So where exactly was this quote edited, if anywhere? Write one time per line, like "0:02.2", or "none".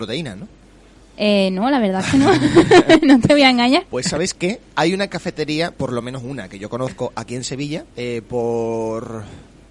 0:07.9